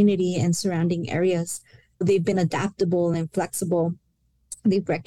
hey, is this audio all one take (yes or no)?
yes